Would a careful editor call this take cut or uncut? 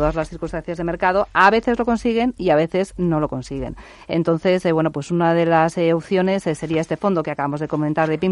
uncut